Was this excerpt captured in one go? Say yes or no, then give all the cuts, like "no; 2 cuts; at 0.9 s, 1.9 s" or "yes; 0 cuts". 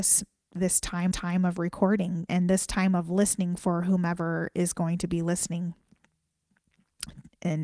no; 2 cuts; at 1.1 s, 2.3 s